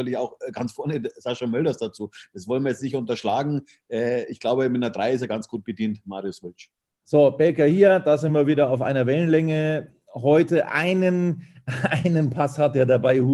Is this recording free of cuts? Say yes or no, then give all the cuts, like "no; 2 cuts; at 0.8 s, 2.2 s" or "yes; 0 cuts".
yes; 0 cuts